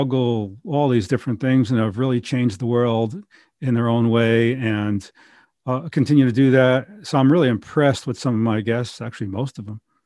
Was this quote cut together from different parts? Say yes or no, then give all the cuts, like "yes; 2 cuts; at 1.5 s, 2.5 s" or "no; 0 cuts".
no; 0 cuts